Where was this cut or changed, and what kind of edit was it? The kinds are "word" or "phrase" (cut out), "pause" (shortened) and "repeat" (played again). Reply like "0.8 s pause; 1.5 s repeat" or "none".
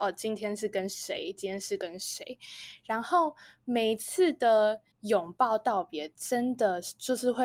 4.9 s pause